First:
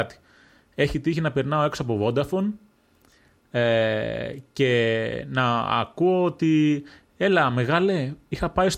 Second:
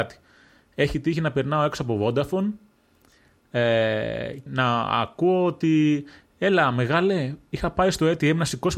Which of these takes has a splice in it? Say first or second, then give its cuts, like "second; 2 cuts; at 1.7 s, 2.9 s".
second; 1 cut; at 4.5 s